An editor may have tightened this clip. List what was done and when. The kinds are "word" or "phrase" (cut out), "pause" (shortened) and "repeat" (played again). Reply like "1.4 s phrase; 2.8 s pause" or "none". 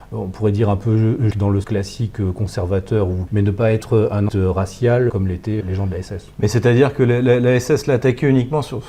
1.3 s word; 1.6 s word; 3.3 s word; 4.3 s word; 5.1 s word; 5.6 s word